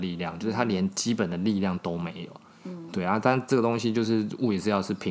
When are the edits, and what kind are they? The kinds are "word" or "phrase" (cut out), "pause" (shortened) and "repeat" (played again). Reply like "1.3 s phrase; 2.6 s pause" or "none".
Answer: none